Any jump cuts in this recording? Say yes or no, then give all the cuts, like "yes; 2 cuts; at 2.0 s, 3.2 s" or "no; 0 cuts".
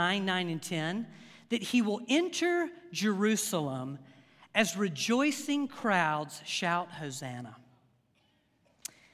no; 0 cuts